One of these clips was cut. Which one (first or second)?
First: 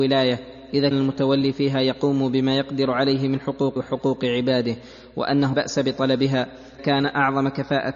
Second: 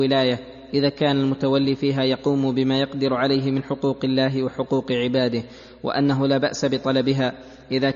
first